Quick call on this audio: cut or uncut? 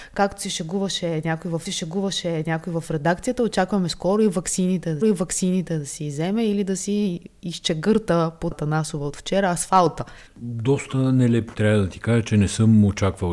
cut